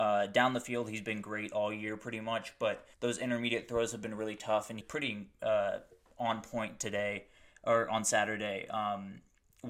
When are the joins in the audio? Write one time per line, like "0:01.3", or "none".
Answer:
0:02.9
0:04.8